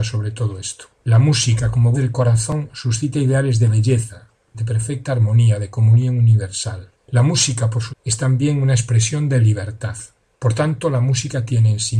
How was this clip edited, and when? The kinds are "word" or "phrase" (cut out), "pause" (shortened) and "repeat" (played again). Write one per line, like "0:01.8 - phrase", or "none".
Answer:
0:00.9 - pause
0:01.9 - word
0:07.0 - pause
0:07.9 - word